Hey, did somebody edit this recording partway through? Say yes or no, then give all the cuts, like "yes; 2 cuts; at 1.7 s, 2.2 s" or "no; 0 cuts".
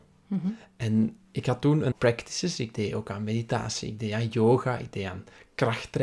yes; 1 cut; at 1.9 s